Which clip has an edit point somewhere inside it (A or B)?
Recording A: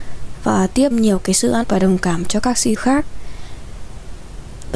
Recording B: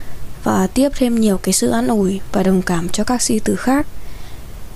A